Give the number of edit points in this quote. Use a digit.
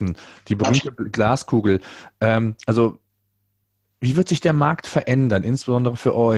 0